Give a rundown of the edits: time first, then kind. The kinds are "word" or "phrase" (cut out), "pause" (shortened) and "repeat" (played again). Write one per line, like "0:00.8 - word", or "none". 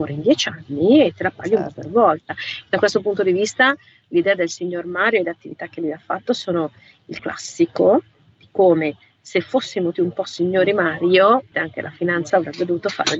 0:07.2 - word
0:09.9 - word
0:11.5 - word
0:12.3 - word